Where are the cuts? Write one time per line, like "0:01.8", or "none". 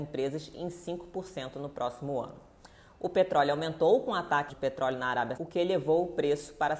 0:04.5
0:05.4